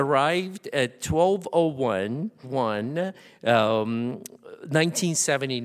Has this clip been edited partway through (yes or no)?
yes